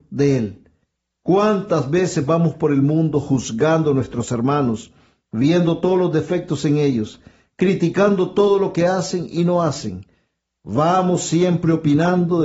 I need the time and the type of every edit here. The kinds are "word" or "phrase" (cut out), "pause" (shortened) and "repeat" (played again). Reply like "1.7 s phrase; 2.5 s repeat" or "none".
none

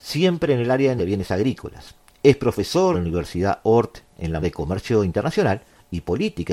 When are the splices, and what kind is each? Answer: 1.0 s word; 2.9 s word; 4.4 s word

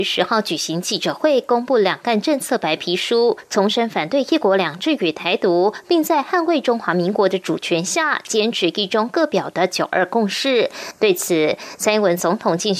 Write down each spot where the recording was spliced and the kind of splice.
none

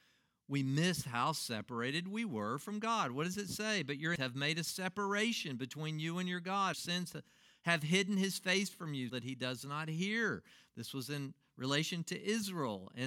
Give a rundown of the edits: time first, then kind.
4.2 s word; 6.7 s phrase; 9.1 s word

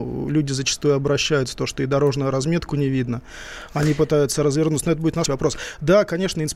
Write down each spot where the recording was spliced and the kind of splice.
5.3 s word

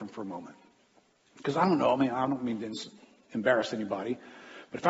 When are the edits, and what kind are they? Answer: none

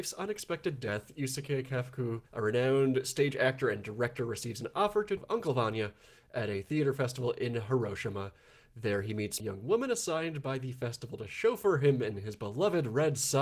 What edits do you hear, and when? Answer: 2.3 s pause; 5.2 s phrase; 9.4 s phrase

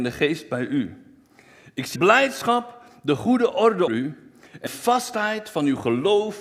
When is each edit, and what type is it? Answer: 2.0 s word; 3.9 s word; 4.7 s word

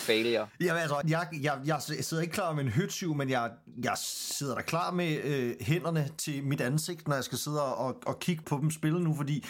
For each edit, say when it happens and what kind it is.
1.0 s phrase; 8.4 s word

